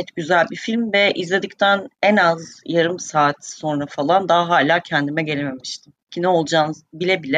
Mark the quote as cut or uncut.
cut